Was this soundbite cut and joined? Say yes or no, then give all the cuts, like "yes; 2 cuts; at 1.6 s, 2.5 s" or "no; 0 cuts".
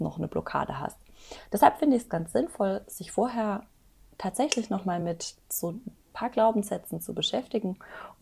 no; 0 cuts